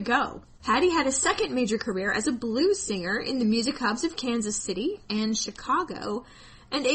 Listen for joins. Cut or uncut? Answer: uncut